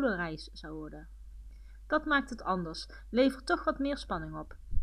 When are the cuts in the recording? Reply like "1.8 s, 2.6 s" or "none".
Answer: none